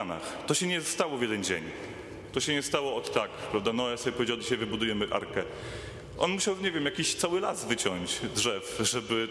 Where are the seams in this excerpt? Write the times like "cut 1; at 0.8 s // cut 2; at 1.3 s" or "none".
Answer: cut 1; at 4.4 s